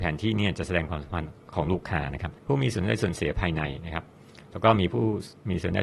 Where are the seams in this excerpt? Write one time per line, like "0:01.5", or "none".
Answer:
0:02.4